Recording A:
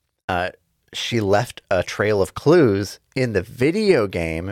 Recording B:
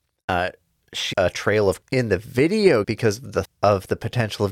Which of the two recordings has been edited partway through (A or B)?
B